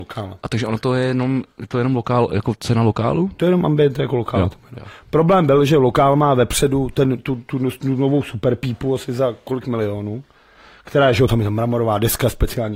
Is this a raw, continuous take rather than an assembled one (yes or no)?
no